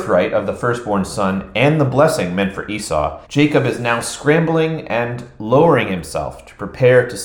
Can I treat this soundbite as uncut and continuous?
no; 1 cut; at 3.2 s

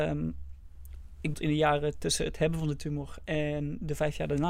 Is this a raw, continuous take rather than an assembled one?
no; 1 cut; at 1.3 s

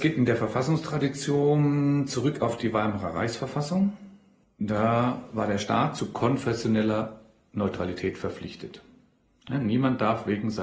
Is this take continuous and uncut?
yes; 0 cuts

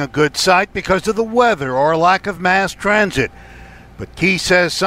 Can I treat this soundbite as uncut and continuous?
yes; 0 cuts

